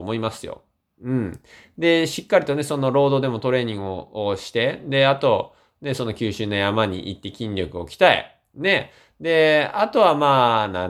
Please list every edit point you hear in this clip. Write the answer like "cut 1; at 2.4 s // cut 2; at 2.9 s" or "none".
none